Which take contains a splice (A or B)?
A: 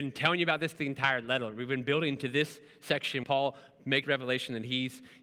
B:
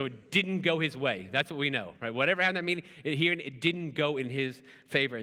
A